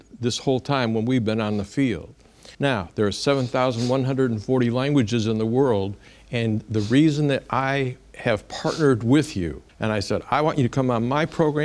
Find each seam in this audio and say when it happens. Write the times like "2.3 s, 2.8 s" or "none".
2.5 s, 9.7 s